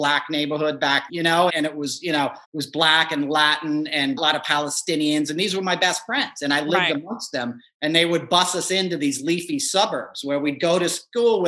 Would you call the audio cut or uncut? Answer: cut